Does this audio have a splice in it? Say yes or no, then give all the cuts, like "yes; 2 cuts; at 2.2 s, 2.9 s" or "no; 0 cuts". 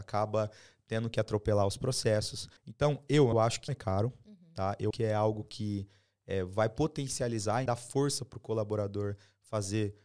yes; 5 cuts; at 2.6 s, 3.3 s, 3.7 s, 4.9 s, 7.7 s